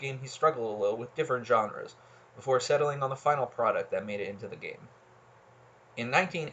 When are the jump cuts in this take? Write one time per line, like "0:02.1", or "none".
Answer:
none